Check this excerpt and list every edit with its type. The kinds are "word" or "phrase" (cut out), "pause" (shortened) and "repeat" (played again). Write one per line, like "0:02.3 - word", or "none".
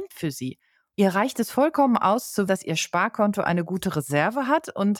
0:02.5 - word